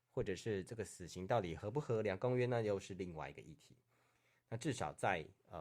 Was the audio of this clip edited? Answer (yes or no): no